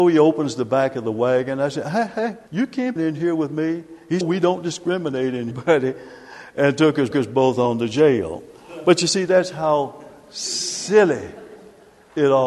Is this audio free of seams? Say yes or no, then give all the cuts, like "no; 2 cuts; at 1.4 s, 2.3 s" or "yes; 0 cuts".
no; 5 cuts; at 2.5 s, 3.0 s, 4.2 s, 5.5 s, 7.1 s